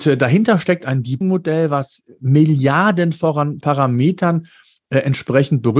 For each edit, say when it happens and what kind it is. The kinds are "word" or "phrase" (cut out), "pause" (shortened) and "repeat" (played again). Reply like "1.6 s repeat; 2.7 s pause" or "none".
1.2 s word; 3.6 s word